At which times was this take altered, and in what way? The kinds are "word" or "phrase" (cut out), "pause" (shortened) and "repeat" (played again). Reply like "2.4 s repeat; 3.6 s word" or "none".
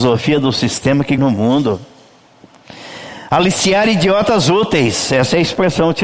1.2 s word